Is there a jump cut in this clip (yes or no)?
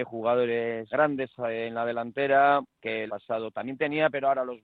yes